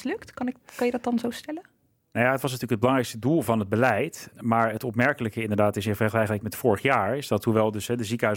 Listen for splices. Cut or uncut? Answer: uncut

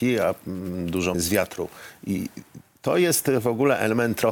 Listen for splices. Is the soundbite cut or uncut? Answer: cut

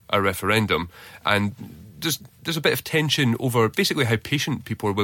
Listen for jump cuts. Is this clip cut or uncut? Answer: uncut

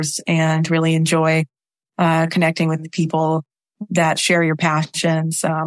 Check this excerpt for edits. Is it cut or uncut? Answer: uncut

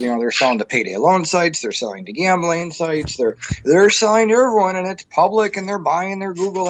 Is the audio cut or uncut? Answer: uncut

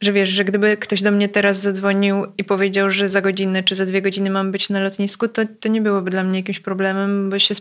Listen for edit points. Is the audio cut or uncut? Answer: uncut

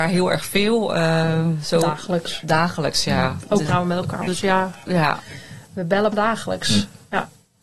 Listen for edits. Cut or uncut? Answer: cut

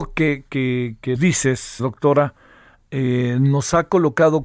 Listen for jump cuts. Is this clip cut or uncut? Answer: cut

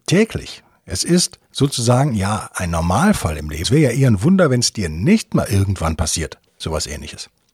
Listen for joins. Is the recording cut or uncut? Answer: cut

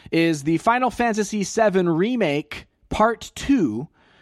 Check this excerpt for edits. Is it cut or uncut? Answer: uncut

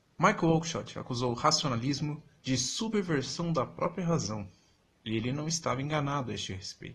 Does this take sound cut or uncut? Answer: uncut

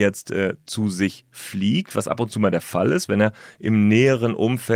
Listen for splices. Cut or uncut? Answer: uncut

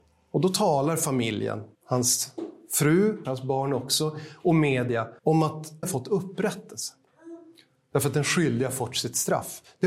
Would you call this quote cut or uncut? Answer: cut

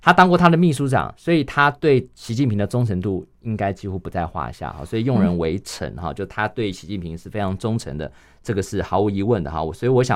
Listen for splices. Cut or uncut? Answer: uncut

